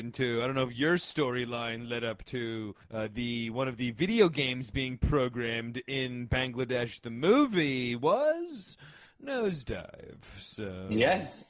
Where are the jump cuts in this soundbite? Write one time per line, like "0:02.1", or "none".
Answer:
0:02.8